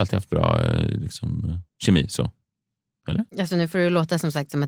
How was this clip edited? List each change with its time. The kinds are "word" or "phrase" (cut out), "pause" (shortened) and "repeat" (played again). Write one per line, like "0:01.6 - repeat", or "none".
0:01.7 - pause
0:03.3 - pause